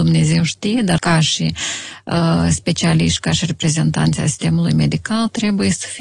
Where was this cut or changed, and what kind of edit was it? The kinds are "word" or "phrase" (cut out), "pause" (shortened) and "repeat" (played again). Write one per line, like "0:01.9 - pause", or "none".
0:01.0 - word